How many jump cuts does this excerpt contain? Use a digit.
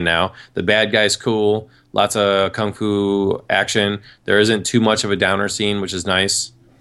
0